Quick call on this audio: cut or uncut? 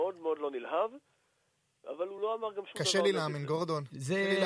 uncut